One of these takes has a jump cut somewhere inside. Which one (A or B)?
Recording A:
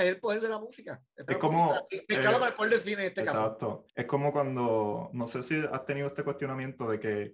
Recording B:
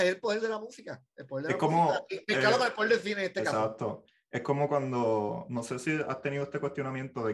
A